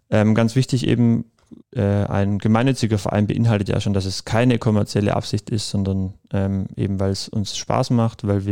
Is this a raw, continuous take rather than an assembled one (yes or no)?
no